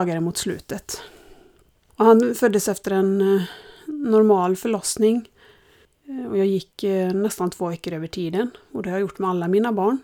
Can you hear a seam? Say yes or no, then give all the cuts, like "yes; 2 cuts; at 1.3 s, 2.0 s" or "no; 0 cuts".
no; 0 cuts